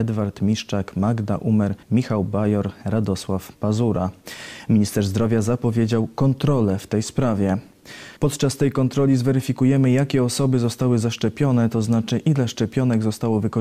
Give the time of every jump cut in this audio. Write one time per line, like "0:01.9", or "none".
0:01.8
0:08.2